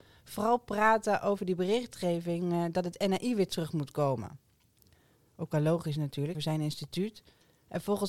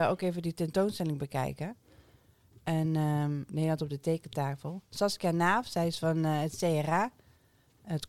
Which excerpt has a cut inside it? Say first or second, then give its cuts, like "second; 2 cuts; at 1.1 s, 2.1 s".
first; 1 cut; at 6.3 s